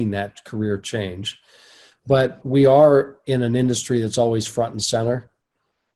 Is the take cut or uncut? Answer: cut